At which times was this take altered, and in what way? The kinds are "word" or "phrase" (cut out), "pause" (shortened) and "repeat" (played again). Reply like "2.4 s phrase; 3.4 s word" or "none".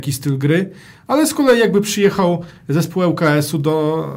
none